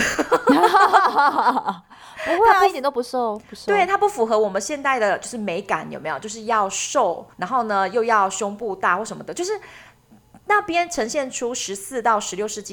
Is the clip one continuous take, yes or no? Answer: no